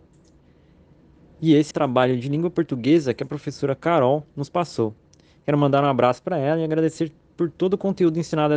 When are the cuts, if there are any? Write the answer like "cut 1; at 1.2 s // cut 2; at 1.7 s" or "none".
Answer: cut 1; at 1.7 s